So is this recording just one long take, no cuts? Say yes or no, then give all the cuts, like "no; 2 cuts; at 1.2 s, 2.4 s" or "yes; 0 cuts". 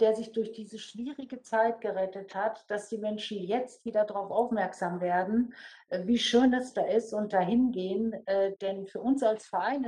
yes; 0 cuts